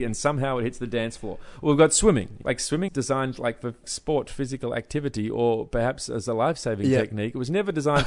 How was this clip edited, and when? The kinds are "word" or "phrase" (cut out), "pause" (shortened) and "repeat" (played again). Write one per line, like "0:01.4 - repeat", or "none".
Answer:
0:02.4 - word
0:02.9 - word
0:03.8 - word